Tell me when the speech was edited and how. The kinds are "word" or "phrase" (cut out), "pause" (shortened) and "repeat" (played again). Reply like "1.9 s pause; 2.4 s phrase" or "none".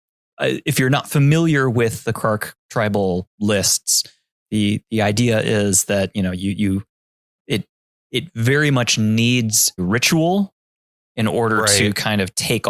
9.8 s word